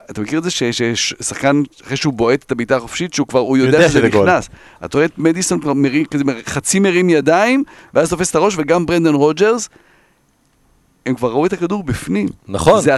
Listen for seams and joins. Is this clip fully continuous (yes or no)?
yes